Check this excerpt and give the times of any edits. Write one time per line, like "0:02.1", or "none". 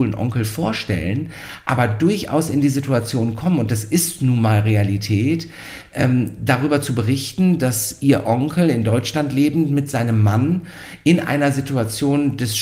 none